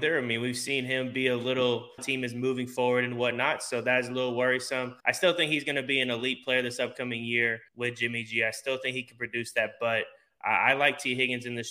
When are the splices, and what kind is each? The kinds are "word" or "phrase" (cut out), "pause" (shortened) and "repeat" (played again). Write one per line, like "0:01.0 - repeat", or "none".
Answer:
0:02.0 - phrase
0:05.0 - pause
0:07.7 - pause